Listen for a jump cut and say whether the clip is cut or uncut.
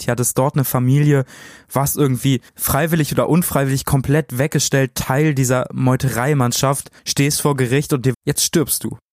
cut